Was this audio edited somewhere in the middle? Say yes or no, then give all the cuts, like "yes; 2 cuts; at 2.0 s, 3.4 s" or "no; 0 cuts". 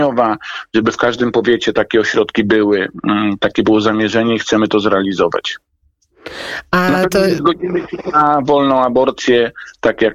no; 0 cuts